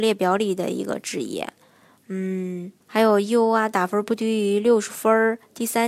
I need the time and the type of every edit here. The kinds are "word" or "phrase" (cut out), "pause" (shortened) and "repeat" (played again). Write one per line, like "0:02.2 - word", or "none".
0:02.8 - pause